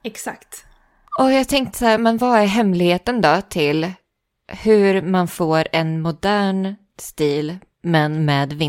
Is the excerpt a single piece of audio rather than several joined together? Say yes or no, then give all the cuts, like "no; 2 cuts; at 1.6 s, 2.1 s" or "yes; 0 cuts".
yes; 0 cuts